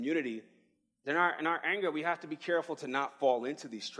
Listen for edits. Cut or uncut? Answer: uncut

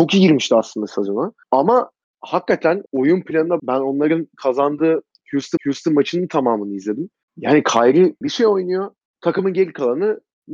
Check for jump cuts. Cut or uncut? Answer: cut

